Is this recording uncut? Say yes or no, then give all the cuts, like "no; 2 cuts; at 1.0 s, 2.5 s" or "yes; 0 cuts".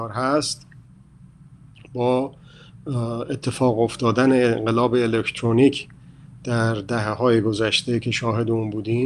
yes; 0 cuts